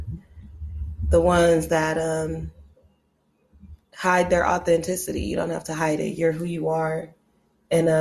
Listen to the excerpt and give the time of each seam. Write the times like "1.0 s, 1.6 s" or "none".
3.8 s